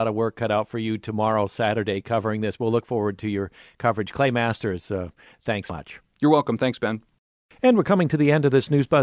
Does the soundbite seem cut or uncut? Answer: uncut